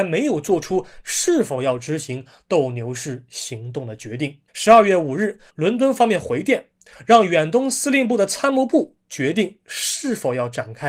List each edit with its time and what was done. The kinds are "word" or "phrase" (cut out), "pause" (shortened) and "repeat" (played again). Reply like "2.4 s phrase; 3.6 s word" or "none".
4.5 s pause; 5.5 s pause